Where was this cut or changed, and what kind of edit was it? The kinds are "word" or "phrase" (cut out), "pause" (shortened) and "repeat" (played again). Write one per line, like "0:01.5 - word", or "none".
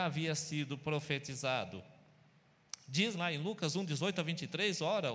0:03.1 - word